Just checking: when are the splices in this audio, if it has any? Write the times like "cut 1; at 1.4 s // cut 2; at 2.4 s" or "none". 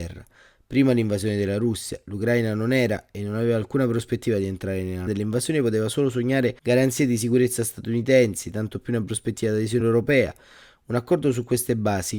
cut 1; at 5.1 s // cut 2; at 6.6 s // cut 3; at 9.8 s